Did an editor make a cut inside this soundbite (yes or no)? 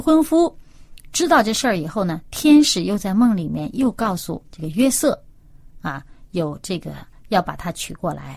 yes